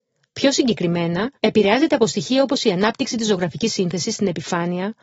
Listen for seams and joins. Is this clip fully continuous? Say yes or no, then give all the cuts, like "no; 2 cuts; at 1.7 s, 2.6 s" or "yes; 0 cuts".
no; 1 cut; at 1.3 s